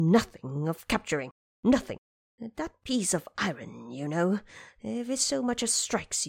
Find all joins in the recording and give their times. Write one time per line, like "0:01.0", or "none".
none